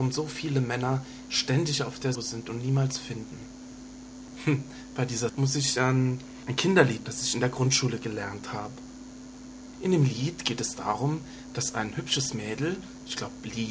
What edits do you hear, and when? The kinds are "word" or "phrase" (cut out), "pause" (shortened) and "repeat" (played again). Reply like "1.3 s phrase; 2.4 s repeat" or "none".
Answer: 2.2 s word; 5.3 s word; 7.0 s word